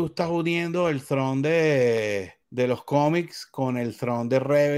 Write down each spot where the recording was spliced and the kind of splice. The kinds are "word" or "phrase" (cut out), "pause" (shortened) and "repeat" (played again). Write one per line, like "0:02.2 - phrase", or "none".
0:02.4 - pause